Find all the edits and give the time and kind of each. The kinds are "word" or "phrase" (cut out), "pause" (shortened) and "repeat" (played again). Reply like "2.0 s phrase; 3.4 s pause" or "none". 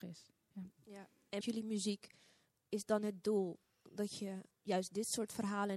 1.4 s word; 4.5 s word